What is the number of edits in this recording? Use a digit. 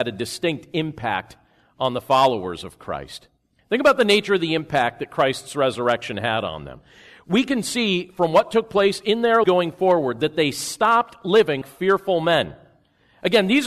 2